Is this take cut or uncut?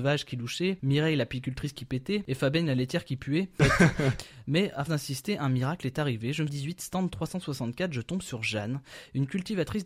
cut